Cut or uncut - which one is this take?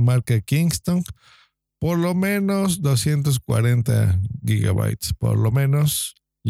uncut